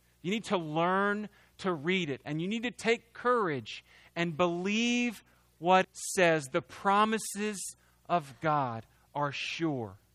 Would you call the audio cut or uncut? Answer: cut